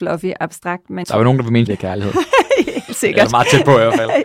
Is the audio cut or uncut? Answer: cut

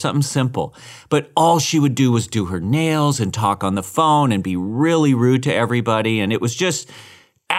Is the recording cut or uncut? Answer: uncut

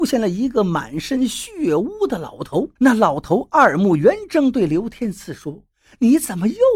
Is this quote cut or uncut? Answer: cut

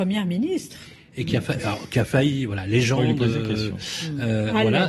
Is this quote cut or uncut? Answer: uncut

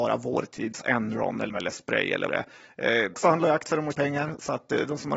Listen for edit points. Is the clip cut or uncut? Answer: cut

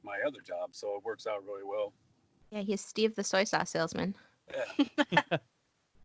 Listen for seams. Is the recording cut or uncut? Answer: uncut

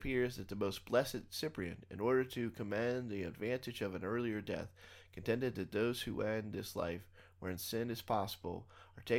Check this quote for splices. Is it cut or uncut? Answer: uncut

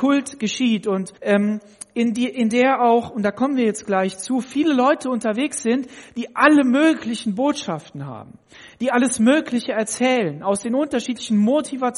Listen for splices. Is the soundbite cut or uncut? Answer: cut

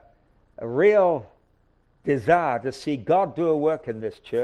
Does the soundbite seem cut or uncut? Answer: uncut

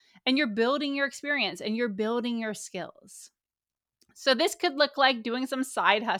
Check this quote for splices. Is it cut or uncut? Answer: uncut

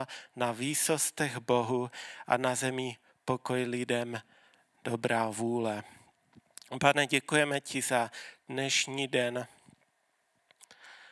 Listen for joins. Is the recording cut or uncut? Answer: uncut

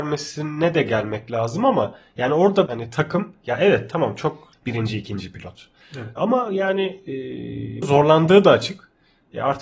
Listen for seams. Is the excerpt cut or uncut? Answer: cut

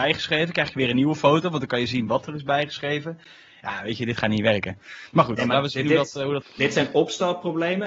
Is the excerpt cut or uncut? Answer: cut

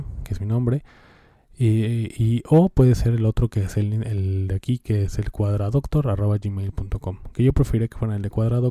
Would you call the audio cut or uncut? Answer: uncut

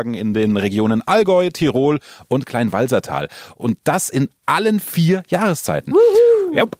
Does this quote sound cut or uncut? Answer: uncut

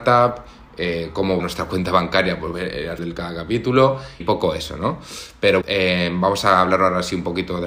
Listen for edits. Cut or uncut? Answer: cut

